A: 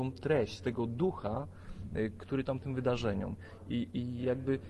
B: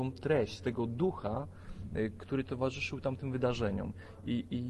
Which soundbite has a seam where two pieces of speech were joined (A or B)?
A